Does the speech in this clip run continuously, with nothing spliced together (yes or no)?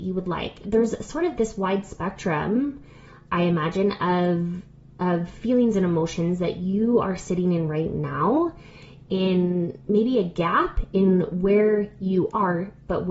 yes